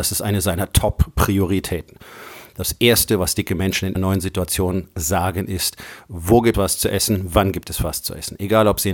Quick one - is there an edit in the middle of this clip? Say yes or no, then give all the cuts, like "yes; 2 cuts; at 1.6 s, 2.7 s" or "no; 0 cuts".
yes; 2 cuts; at 3.9 s, 6.5 s